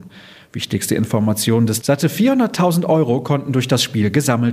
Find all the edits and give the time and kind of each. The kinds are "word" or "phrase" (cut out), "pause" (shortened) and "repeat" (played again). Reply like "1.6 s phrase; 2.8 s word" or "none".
1.8 s phrase